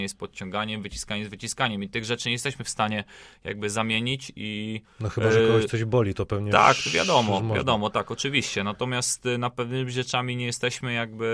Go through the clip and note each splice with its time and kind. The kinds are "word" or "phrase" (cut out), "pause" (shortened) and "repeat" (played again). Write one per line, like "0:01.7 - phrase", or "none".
none